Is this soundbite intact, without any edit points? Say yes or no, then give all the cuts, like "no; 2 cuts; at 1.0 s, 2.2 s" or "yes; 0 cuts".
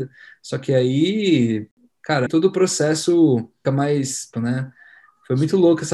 no; 3 cuts; at 2.3 s, 3.6 s, 4.3 s